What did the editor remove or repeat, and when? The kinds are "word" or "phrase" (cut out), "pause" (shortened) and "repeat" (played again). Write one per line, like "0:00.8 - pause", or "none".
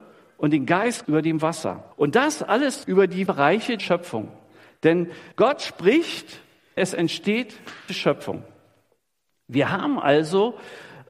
0:01.0 - word
0:01.9 - pause
0:02.8 - word
0:03.3 - word
0:03.8 - phrase
0:05.3 - pause
0:06.8 - word
0:07.9 - word